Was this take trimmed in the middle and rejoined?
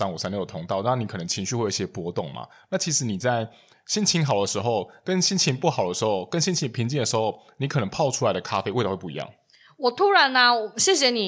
no; 0 cuts

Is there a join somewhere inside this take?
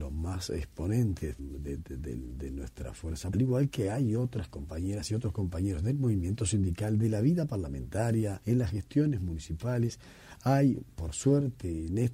yes; 4 cuts; at 1.4 s, 1.8 s, 3.3 s, 8.4 s

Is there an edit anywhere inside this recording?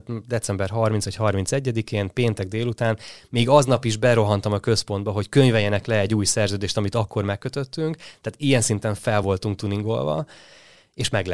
no; 0 cuts

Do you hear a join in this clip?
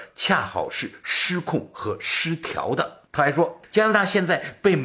yes; 1 cut; at 3.1 s

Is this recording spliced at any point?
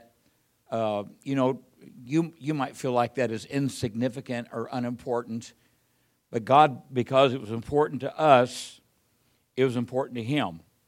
no; 0 cuts

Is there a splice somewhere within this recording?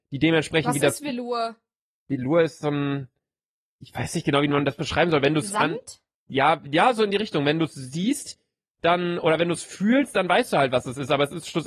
no; 0 cuts

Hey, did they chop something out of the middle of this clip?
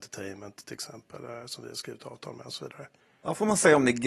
yes; 1 cut; at 3.0 s

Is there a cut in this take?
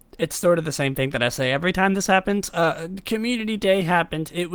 no; 0 cuts

